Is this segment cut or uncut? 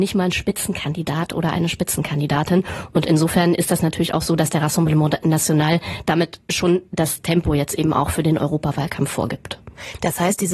uncut